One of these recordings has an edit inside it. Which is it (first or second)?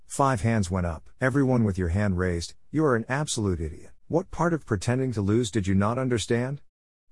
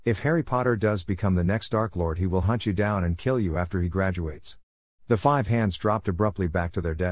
first